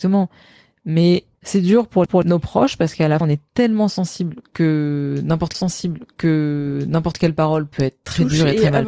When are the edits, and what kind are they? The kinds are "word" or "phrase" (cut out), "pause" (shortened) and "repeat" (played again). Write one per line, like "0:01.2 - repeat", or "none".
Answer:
0:01.3 - pause
0:02.1 - repeat
0:03.2 - word
0:05.5 - repeat